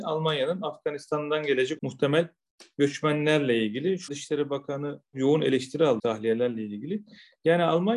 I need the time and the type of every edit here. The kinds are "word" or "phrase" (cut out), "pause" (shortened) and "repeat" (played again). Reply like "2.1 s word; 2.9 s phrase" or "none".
1.8 s word; 4.1 s word; 5.1 s word; 6.0 s word